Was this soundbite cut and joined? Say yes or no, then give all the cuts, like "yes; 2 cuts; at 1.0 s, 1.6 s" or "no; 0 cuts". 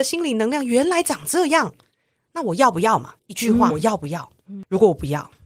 yes; 2 cuts; at 3.2 s, 3.7 s